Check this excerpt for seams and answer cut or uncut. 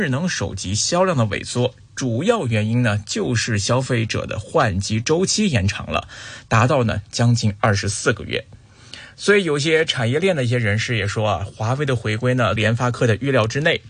cut